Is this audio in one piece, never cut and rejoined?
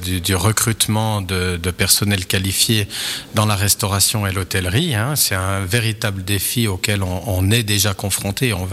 yes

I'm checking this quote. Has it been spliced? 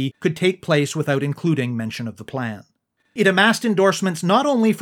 no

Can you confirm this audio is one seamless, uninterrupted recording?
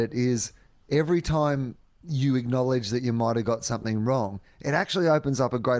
yes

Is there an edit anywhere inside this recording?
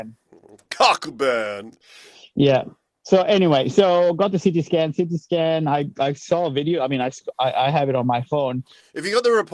no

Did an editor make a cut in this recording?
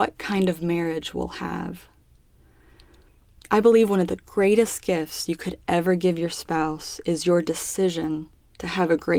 no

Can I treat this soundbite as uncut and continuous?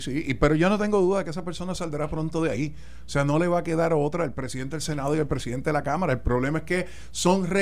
yes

